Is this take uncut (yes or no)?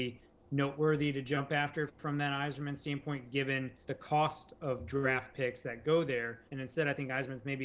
no